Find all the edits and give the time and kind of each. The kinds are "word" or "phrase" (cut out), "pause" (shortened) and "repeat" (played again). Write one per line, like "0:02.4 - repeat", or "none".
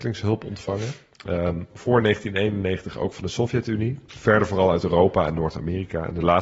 none